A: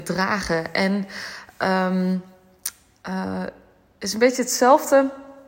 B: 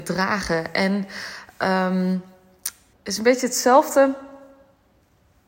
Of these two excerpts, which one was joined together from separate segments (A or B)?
B